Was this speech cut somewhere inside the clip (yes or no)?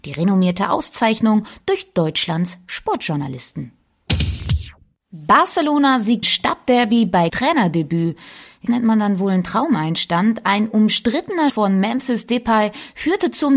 yes